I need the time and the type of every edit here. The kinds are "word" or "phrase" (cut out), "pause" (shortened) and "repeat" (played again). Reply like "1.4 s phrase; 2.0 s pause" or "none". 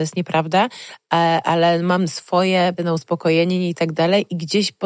2.8 s word